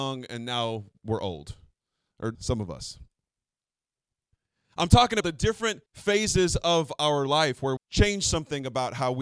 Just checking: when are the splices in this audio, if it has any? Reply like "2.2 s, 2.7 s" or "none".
2.3 s, 5.2 s, 5.9 s, 7.8 s